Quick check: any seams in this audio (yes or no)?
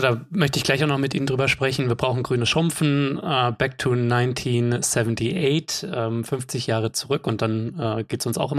no